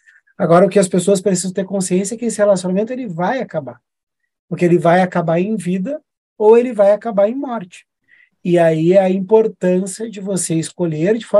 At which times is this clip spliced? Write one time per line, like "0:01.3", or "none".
none